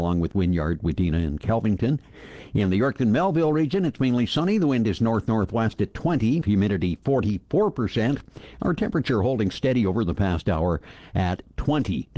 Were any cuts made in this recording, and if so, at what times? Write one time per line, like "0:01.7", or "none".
0:06.4